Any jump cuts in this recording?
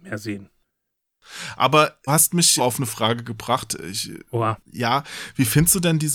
yes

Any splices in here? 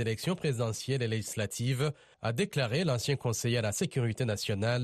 no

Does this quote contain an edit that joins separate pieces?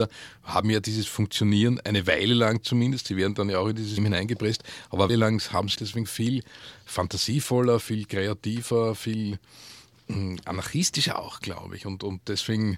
yes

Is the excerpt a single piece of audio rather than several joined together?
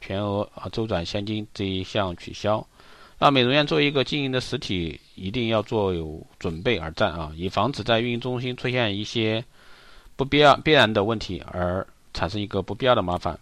yes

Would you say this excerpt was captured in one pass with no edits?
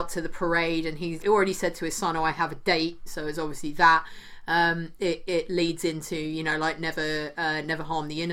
no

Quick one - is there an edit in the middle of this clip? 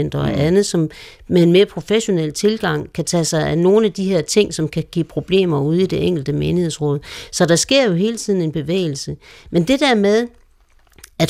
no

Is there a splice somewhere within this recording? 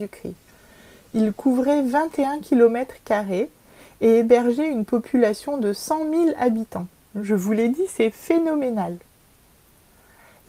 no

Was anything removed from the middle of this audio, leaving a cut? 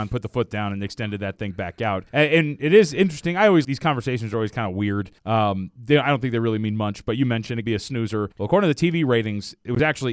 yes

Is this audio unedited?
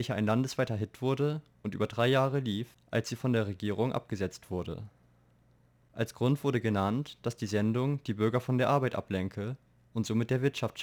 yes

